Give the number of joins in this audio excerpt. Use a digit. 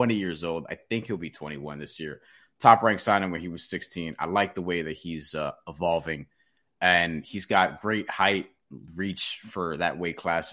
0